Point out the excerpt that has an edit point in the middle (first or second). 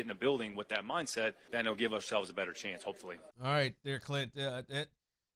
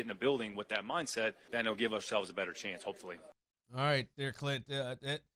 first